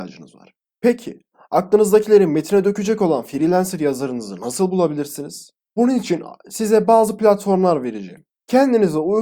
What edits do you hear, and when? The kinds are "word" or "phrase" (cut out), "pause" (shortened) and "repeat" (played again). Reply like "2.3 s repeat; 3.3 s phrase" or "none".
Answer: none